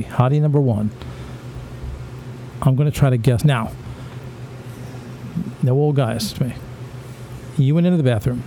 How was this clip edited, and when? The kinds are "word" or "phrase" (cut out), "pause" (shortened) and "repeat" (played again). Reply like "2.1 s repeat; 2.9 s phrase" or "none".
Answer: 3.4 s word; 6.3 s word